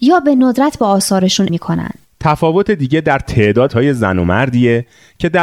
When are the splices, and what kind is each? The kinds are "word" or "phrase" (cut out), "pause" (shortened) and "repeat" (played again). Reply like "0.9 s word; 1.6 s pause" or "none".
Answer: 1.5 s word; 3.7 s word

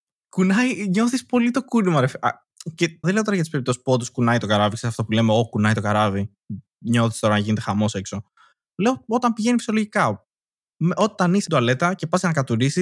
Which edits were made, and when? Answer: 3.0 s word; 11.5 s word

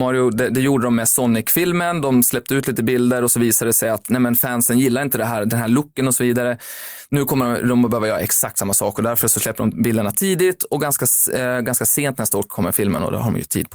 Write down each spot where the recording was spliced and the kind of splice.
none

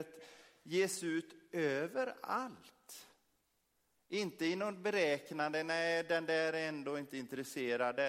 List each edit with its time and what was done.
none

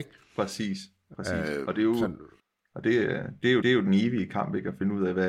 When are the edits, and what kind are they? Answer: 2.4 s pause; 3.6 s repeat

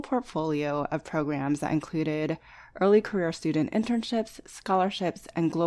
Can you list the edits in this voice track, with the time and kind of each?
none

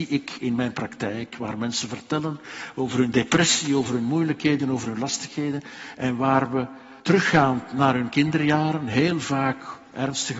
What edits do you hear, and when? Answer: 7.0 s pause

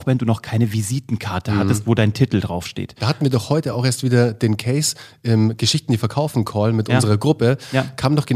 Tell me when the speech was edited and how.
none

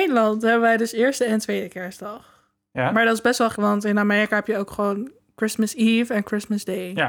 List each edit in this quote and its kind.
3.5 s word

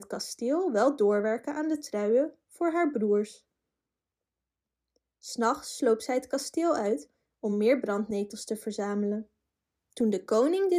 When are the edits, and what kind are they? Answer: none

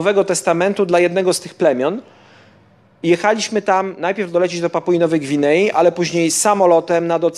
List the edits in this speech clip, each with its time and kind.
none

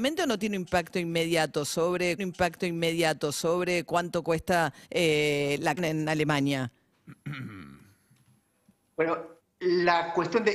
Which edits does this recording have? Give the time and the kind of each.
2.2 s repeat; 4.8 s pause; 5.8 s word; 9.4 s pause

